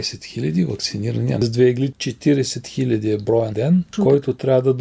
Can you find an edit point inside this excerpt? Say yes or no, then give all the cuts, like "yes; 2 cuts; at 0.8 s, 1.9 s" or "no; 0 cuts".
yes; 1 cut; at 3.5 s